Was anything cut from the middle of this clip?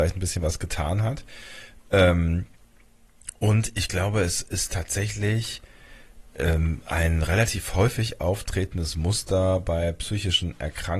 yes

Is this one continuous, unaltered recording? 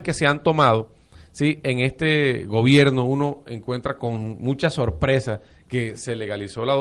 yes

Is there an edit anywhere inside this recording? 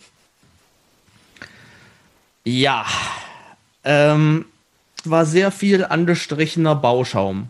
yes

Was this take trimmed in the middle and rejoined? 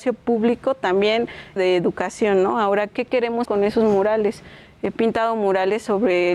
yes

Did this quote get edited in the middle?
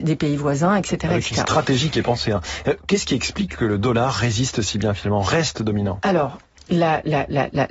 no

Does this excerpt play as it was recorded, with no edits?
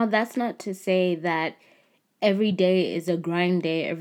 yes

